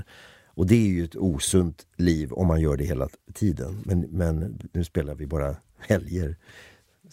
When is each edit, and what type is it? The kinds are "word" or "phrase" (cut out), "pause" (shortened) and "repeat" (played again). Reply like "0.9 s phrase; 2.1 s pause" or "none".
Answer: none